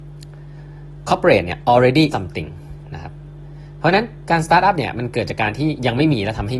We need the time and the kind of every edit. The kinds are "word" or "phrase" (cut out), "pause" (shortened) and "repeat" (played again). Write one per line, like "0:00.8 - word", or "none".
0:02.1 - word